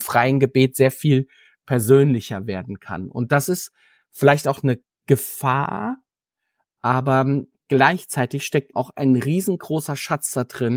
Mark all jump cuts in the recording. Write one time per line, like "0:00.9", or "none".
0:08.7